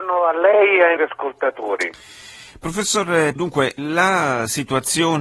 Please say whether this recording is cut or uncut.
cut